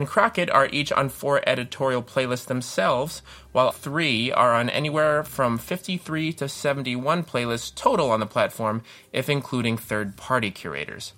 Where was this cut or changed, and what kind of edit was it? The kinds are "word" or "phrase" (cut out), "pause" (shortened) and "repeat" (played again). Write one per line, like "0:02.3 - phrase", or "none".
0:03.7 - word